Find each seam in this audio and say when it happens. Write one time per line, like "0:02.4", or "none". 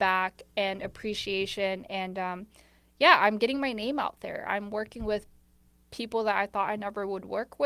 none

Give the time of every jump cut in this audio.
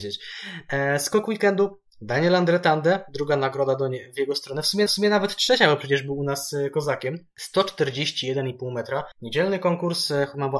0:04.9
0:09.1

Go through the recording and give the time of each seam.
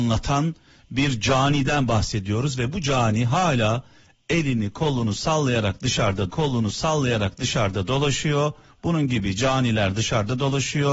0:06.3

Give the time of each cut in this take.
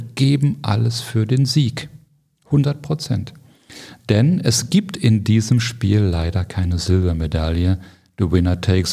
none

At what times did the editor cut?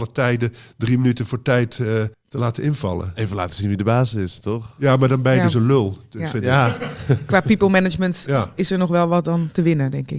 0:02.1

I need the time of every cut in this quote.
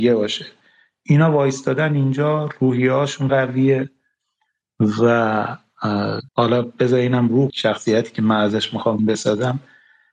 0:03.3
0:06.3
0:07.5
0:09.0

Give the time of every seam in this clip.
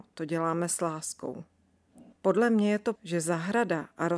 0:02.1
0:03.0

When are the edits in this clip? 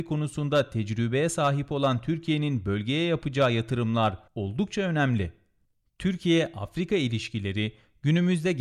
0:04.3

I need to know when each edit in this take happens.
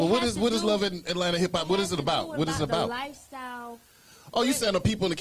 none

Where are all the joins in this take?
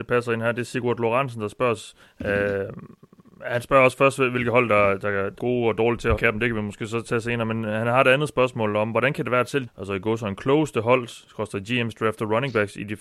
0:02.0
0:05.4
0:06.2
0:09.7

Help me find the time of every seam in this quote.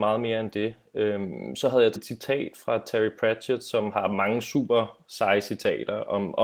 0:02.0
0:03.9

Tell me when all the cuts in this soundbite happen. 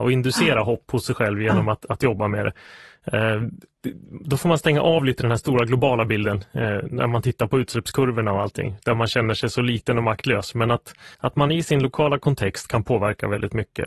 0:11.1

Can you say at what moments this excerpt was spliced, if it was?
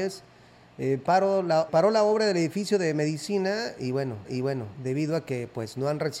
0:01.7
0:04.2

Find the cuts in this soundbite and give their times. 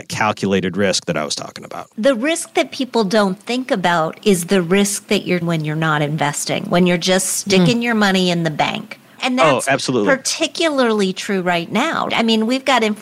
0:05.4

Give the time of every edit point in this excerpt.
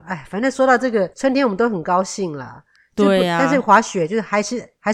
0:01.1

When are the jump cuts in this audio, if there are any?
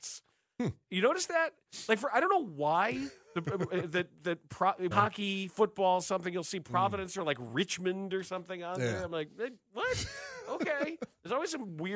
0:04.9

